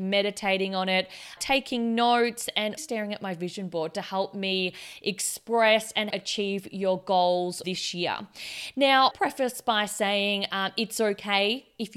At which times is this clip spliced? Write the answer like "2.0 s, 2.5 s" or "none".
1.4 s, 2.8 s, 6.1 s, 7.6 s, 9.1 s